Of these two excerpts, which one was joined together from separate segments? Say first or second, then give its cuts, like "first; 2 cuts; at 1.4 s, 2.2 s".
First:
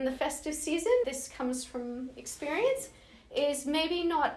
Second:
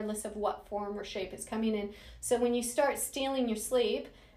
first; 1 cut; at 1.0 s